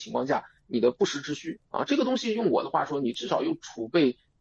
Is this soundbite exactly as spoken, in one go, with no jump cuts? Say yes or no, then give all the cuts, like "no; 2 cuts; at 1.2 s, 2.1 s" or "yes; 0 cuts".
no; 1 cut; at 1.7 s